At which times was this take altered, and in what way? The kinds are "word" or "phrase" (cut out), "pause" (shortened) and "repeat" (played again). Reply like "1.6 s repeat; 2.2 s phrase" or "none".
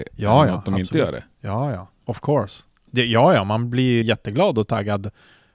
2.0 s pause; 4.0 s word